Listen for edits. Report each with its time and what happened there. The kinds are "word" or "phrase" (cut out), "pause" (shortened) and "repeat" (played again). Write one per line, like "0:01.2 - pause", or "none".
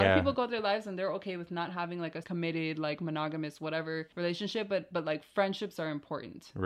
0:02.2 - word
0:04.1 - pause